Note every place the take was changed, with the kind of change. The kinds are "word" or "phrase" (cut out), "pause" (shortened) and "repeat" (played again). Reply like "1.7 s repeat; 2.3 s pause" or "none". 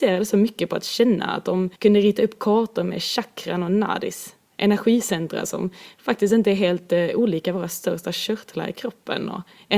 1.7 s pause